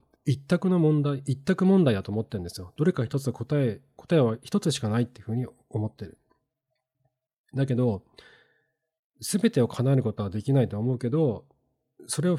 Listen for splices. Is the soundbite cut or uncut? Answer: uncut